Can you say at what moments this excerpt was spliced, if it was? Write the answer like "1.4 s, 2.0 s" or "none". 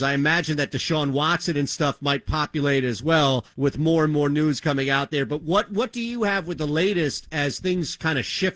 3.5 s